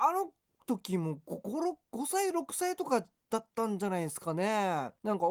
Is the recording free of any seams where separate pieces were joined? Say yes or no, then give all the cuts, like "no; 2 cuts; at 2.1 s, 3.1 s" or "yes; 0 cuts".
yes; 0 cuts